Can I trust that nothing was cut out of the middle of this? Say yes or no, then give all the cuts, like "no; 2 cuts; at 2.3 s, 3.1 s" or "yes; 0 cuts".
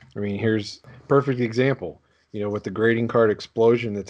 yes; 0 cuts